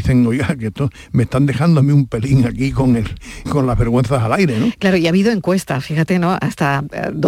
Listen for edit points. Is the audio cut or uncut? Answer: cut